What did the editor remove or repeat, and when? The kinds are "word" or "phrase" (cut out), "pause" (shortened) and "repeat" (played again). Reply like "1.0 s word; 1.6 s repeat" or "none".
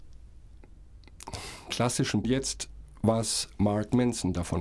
1.7 s word; 2.2 s phrase